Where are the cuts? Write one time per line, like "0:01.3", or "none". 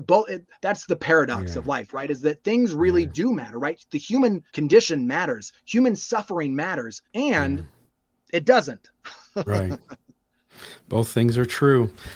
0:04.5
0:07.1